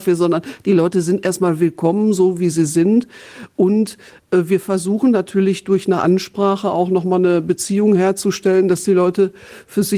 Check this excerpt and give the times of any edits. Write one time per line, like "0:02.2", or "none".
none